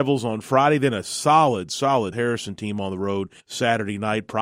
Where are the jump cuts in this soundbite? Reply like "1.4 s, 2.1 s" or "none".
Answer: 2.1 s, 3.4 s